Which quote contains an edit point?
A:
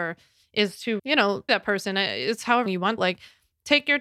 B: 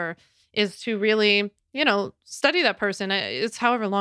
A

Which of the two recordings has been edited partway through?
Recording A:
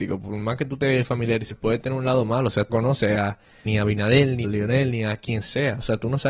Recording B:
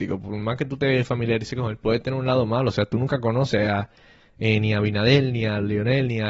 A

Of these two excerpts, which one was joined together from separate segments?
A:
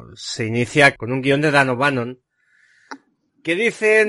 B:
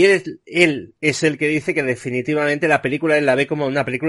A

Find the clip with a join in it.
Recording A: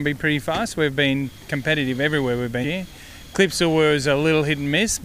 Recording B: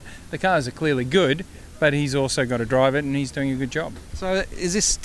A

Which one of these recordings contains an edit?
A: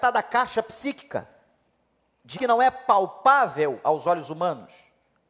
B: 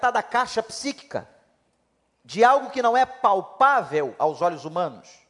A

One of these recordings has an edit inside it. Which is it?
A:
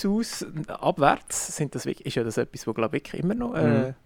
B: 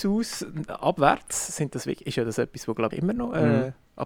B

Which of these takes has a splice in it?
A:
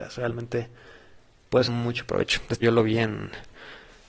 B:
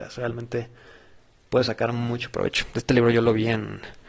A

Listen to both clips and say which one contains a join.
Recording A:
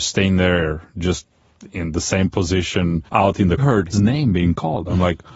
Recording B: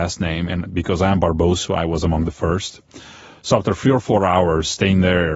A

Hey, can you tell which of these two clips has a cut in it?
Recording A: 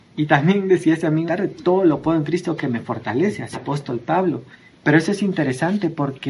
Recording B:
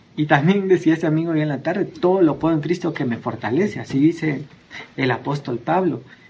A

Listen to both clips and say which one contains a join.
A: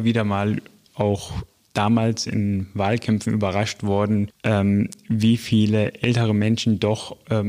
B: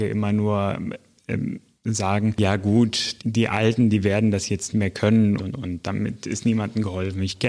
B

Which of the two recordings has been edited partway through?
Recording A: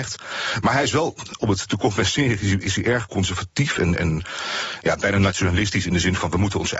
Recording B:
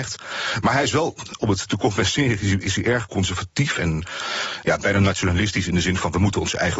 B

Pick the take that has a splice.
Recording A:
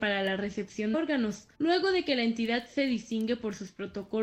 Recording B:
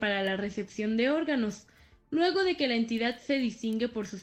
A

